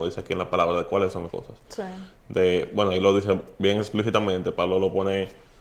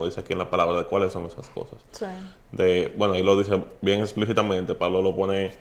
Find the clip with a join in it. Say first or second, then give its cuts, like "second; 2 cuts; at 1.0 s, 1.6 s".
first; 1 cut; at 1.3 s